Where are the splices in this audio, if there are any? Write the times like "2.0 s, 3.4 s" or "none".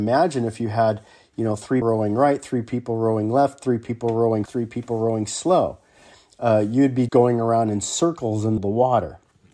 1.8 s, 4.5 s, 7.1 s, 8.6 s